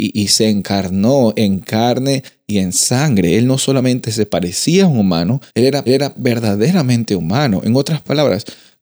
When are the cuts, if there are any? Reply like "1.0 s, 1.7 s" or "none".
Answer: 5.5 s, 5.9 s